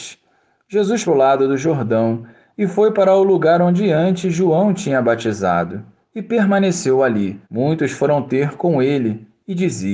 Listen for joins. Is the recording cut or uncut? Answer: cut